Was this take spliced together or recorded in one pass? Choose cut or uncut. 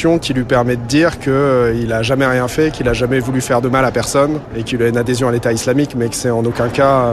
uncut